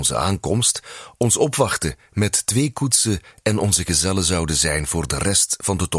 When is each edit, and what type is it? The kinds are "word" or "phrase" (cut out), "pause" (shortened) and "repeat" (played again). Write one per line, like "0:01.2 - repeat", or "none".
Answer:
none